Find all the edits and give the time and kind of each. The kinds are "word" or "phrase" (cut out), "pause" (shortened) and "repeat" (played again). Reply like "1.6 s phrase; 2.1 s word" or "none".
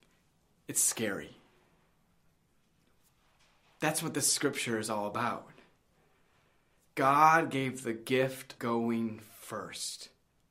8.6 s word